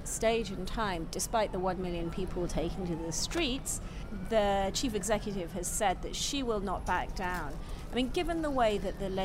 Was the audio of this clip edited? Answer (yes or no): no